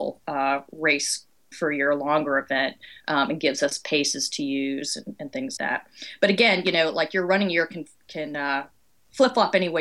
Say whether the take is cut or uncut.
cut